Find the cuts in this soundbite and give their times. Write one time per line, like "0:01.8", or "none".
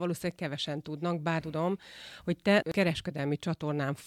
0:01.4
0:02.6